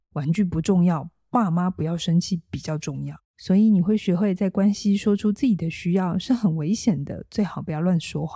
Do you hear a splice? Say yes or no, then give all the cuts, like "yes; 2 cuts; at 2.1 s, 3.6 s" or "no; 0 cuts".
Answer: yes; 1 cut; at 3.2 s